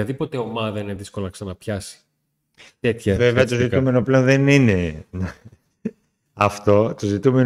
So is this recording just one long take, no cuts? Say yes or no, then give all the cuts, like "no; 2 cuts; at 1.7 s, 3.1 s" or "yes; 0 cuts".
yes; 0 cuts